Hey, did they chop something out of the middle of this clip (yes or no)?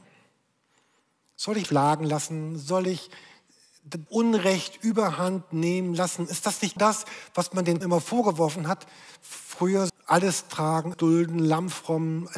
yes